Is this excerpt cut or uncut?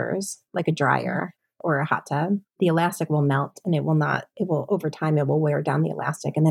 cut